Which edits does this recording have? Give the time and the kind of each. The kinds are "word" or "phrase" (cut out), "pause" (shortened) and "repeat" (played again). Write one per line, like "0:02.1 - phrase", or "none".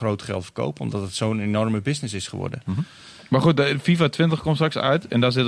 none